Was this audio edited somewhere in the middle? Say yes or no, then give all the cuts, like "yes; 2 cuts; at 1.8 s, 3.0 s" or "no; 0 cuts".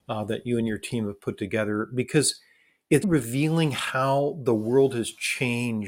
yes; 1 cut; at 3.0 s